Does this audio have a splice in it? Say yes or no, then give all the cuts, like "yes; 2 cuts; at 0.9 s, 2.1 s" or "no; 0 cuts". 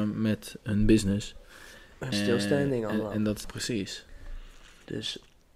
yes; 2 cuts; at 2.1 s, 3.4 s